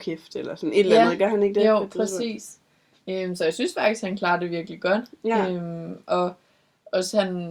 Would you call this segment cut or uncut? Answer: uncut